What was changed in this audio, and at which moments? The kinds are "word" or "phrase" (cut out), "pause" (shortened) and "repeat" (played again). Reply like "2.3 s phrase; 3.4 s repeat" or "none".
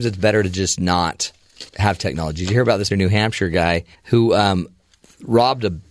1.7 s pause; 2.9 s word; 3.9 s pause